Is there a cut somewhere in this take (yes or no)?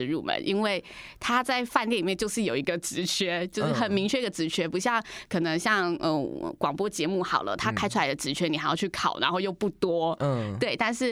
no